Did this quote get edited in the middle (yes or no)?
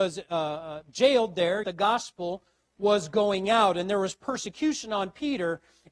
yes